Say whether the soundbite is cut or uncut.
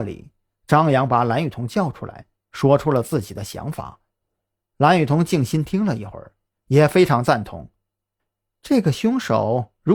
cut